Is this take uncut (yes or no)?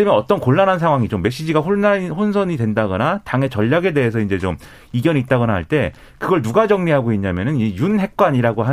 yes